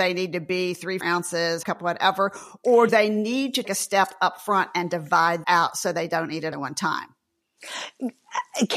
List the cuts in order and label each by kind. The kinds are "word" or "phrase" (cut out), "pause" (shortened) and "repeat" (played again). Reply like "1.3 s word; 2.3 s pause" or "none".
1.0 s word; 1.6 s word; 2.9 s word; 3.6 s word; 5.4 s word; 6.5 s word